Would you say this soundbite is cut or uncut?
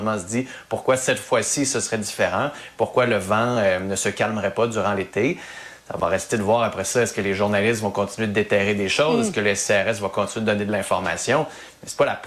uncut